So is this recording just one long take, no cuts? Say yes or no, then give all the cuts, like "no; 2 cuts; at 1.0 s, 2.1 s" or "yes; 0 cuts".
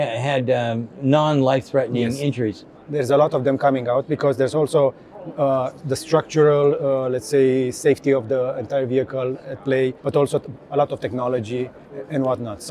no; 1 cut; at 10.0 s